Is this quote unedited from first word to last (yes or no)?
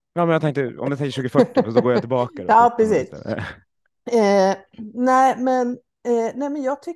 yes